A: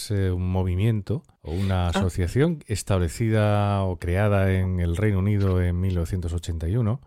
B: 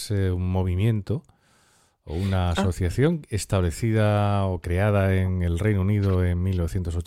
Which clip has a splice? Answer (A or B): A